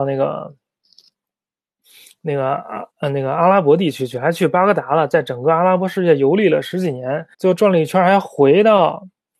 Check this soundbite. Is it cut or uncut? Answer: cut